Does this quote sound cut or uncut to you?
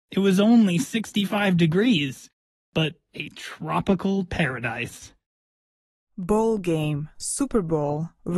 cut